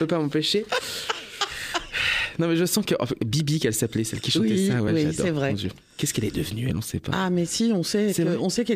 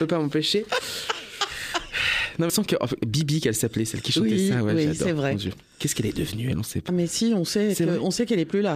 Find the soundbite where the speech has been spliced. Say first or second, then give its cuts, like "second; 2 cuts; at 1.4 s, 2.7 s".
second; 2 cuts; at 2.5 s, 6.9 s